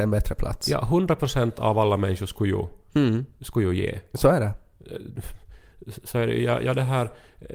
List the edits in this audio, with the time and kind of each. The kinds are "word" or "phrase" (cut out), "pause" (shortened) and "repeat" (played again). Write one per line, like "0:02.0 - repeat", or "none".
none